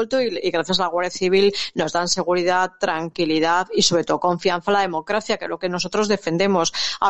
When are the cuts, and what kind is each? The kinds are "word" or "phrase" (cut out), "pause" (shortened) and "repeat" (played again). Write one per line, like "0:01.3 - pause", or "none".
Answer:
none